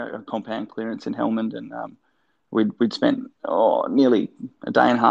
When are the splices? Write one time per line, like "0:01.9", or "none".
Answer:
none